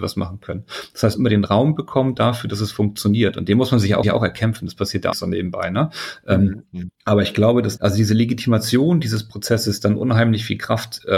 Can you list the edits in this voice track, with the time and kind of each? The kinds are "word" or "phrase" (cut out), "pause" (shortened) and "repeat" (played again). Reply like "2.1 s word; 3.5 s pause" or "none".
1.1 s phrase; 4.0 s repeat; 5.1 s phrase; 6.9 s pause; 7.8 s word